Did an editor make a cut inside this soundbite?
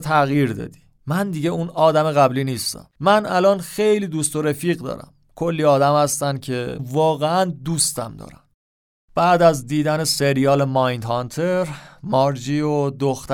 yes; 1 cut; at 6.8 s

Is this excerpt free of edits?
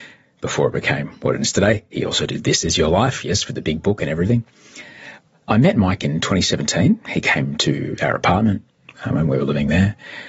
yes; 0 cuts

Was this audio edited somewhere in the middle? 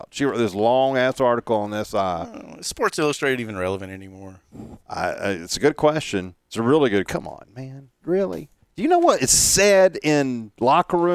yes; 5 cuts; at 4.8 s, 6.4 s, 7.1 s, 8.0 s, 8.6 s

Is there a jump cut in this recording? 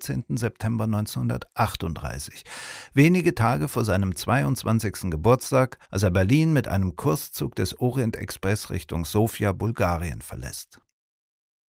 yes; 1 cut; at 5.8 s

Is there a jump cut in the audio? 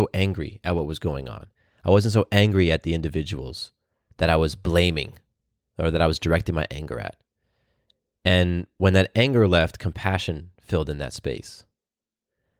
no; 0 cuts

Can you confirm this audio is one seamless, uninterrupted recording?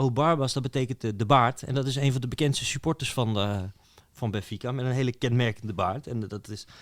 yes; 0 cuts

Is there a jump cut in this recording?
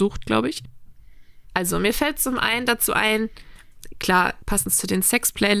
no; 0 cuts

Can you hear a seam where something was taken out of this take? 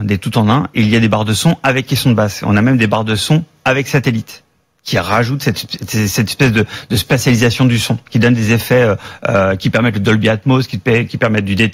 no; 0 cuts

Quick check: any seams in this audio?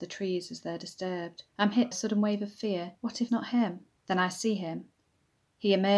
yes; 5 cuts; at 1.5 s, 1.9 s, 3.0 s, 3.3 s, 4.0 s

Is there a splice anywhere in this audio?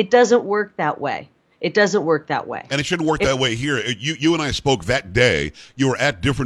no; 0 cuts

